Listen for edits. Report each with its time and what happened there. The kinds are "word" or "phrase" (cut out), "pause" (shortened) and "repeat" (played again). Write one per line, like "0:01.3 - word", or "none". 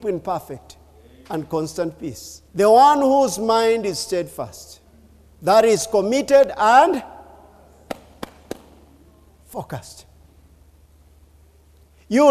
0:02.5 - pause